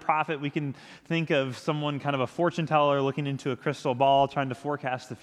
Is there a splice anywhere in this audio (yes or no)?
no